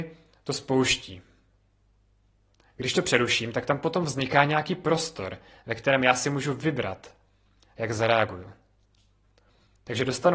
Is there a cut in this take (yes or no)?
no